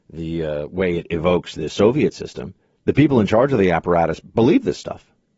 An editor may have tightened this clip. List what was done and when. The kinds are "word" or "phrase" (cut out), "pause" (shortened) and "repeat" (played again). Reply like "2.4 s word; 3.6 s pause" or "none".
2.7 s pause